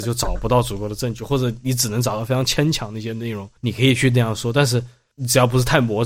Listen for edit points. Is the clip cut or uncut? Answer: cut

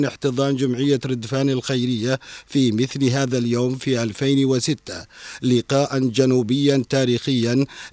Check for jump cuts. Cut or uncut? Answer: uncut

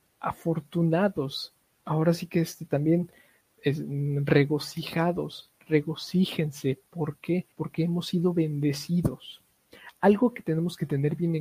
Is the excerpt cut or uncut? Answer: cut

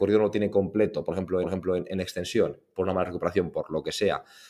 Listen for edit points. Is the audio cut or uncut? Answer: cut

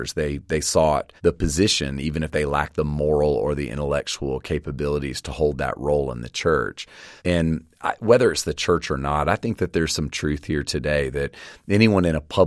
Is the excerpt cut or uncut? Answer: cut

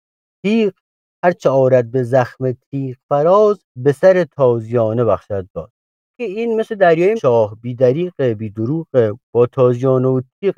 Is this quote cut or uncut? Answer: cut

